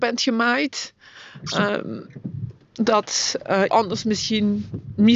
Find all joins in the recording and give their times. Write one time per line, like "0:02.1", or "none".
0:03.7